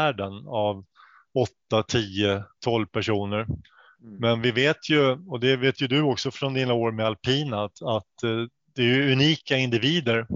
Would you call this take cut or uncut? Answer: uncut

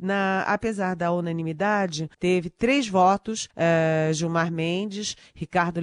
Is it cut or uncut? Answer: cut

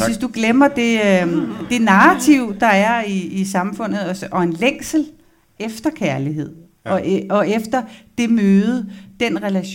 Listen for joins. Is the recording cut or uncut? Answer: uncut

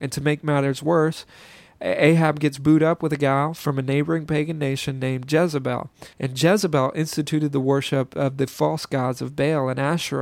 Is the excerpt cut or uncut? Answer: cut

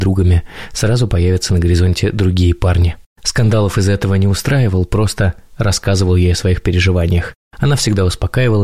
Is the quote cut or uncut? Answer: uncut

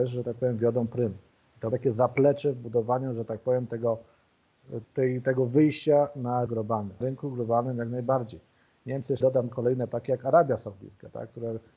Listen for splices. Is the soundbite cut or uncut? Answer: cut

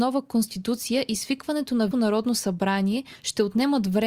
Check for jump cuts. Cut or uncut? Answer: cut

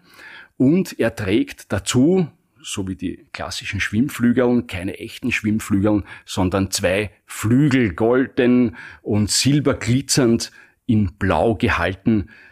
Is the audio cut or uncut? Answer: uncut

